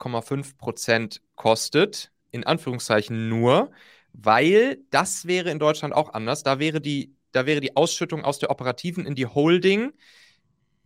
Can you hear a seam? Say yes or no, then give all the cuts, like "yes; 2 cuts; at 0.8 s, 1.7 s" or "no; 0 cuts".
no; 0 cuts